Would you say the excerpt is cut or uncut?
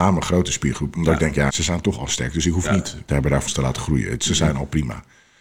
cut